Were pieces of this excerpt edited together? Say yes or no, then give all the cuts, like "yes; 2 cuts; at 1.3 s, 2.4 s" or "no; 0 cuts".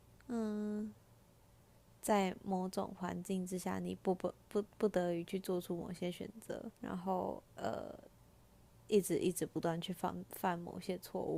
yes; 2 cuts; at 6.7 s, 7.5 s